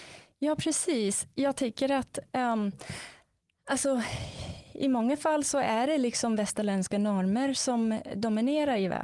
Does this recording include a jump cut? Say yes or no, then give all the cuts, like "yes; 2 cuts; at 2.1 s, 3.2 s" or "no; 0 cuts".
no; 0 cuts